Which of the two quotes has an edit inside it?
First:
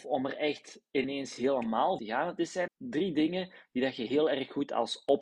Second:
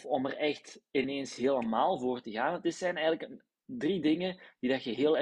first; 2 cuts; at 2.0 s, 2.7 s

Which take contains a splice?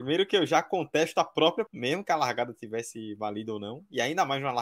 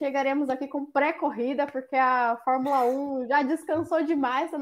first; 1 cut; at 1.7 s

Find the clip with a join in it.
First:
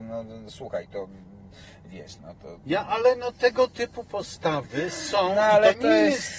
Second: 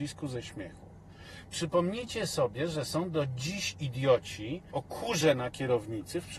second; 1 cut; at 4.7 s

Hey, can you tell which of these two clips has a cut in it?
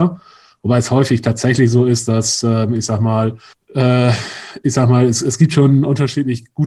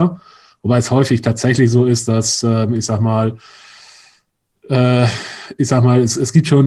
first; 1 cut; at 3.5 s

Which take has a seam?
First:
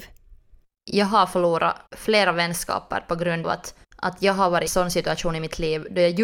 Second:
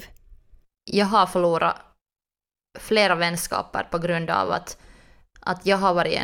first; 4 cuts; at 1.9 s, 3.4 s, 3.8 s, 4.7 s

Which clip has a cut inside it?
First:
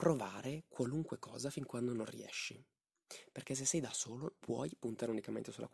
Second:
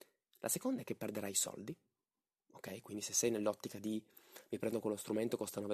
first; 1 cut; at 4.4 s

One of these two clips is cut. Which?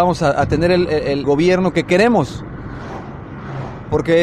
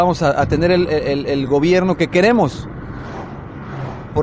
first; 1 cut; at 1.2 s

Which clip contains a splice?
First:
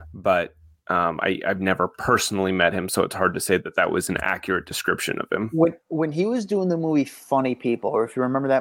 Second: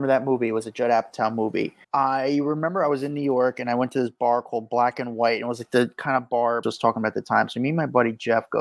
second; 2 cuts; at 1.8 s, 6.6 s

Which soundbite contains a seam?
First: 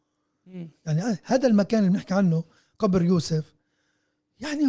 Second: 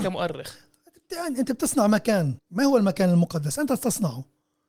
second; 1 cut; at 2.4 s

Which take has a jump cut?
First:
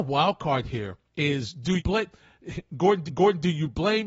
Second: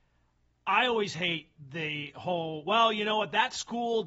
first; 3 cuts; at 1.0 s, 1.8 s, 3.1 s

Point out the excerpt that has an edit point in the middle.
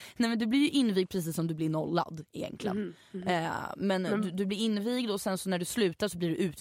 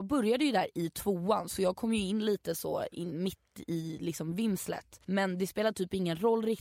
second; 1 cut; at 5.0 s

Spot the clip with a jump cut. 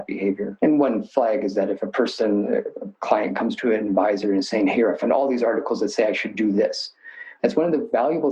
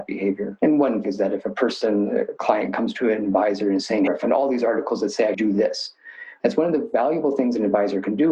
second; 4 cuts; at 1.0 s, 2.4 s, 4.1 s, 5.3 s

